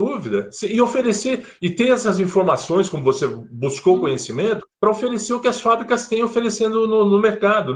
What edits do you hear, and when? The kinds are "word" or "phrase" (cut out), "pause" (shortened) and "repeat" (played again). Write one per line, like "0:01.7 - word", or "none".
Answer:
0:04.7 - pause